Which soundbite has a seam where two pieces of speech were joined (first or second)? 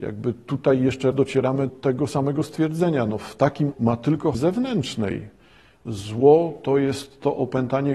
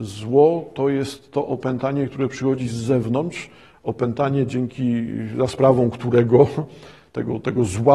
first